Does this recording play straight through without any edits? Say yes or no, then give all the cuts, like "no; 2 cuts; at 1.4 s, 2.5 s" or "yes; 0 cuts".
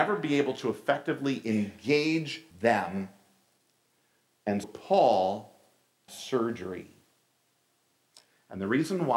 no; 3 cuts; at 2.5 s, 4.6 s, 6.1 s